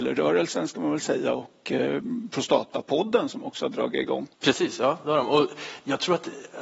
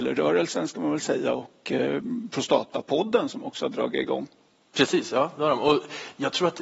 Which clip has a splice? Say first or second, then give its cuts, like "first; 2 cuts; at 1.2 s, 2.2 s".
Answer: first; 1 cut; at 4.3 s